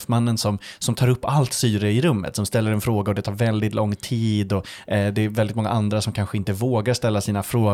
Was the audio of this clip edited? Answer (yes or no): no